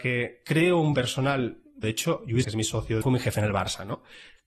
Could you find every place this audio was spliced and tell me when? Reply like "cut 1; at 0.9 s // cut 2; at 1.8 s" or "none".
cut 1; at 0.9 s // cut 2; at 1.8 s // cut 3; at 2.4 s // cut 4; at 3.0 s